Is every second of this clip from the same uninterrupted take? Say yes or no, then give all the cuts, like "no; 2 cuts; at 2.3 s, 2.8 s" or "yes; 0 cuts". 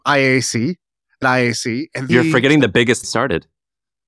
no; 3 cuts; at 1.2 s, 2.1 s, 3.0 s